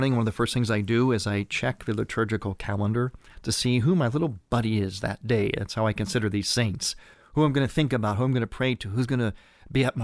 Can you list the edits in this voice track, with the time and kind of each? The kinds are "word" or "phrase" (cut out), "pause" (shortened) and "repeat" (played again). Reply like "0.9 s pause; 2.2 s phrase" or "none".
none